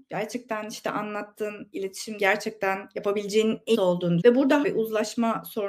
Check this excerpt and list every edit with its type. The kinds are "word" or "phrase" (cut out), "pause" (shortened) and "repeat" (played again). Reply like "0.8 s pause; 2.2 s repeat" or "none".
2.2 s word; 3.7 s word; 4.2 s word; 4.6 s word